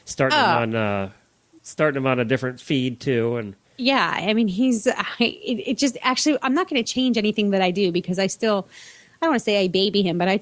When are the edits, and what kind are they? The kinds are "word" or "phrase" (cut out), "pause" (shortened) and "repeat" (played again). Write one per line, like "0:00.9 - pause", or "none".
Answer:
0:03.6 - pause